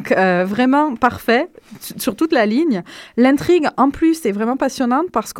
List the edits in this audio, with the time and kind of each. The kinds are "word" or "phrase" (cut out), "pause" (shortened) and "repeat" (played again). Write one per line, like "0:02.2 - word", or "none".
none